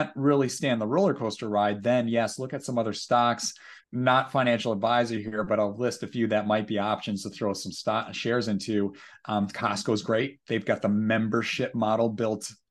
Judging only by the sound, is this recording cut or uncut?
cut